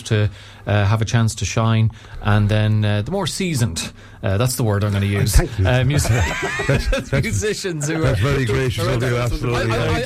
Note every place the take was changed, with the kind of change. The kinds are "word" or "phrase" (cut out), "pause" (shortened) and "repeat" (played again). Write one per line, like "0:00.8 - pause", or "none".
none